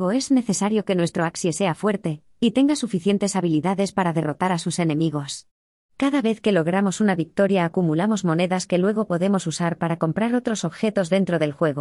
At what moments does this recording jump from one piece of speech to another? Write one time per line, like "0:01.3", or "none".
none